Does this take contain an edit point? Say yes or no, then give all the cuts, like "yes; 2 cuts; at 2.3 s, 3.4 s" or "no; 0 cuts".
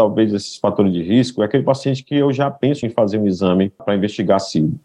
yes; 1 cut; at 2.8 s